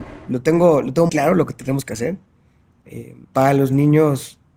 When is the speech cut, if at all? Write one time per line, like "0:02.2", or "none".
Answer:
0:01.1
0:03.2